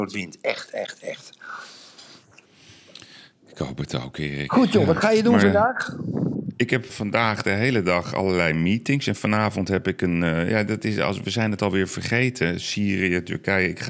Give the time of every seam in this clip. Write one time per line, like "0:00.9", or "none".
0:06.9